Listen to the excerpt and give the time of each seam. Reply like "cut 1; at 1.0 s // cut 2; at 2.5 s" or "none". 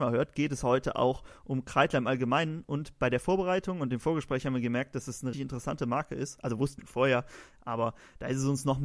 cut 1; at 5.3 s // cut 2; at 6.8 s

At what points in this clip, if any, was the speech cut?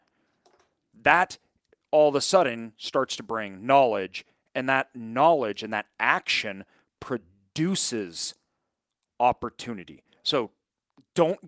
none

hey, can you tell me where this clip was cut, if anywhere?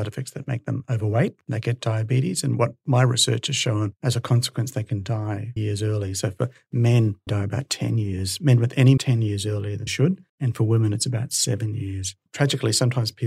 cut 1; at 5.6 s // cut 2; at 7.3 s // cut 3; at 9.0 s // cut 4; at 9.9 s // cut 5; at 10.3 s // cut 6; at 12.3 s

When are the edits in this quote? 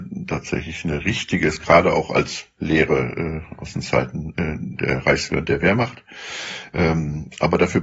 none

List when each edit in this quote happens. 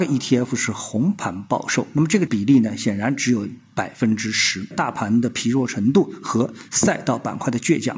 cut 1; at 4.7 s

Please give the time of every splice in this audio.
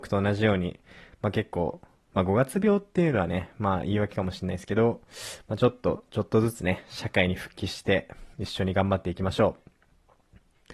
cut 1; at 8.3 s

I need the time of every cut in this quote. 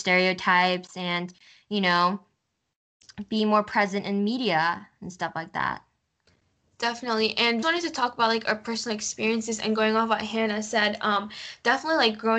cut 1; at 7.6 s

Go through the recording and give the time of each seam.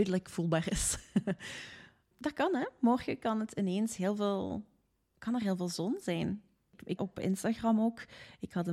cut 1; at 7.0 s

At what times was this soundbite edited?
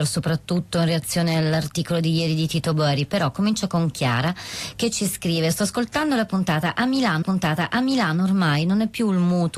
cut 1; at 7.2 s

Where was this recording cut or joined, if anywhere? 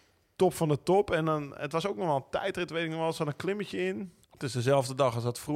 cut 1; at 4.2 s

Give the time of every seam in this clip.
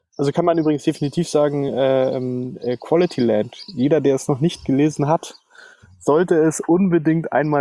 none

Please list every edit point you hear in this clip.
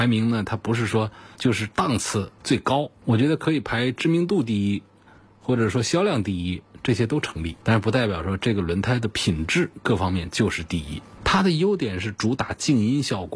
cut 1; at 1.3 s // cut 2; at 2.4 s

